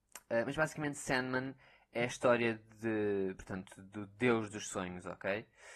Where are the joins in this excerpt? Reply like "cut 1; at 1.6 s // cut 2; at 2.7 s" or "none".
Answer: none